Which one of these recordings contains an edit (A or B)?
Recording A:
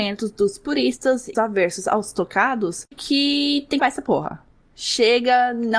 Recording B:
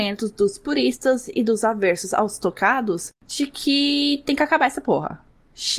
A